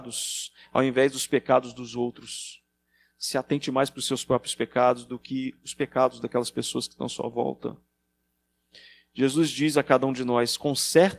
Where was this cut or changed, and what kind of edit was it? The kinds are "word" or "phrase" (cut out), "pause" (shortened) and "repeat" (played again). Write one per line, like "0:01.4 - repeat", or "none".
none